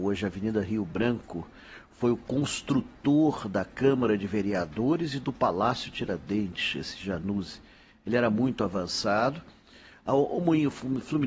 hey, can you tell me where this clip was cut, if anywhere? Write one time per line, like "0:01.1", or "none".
none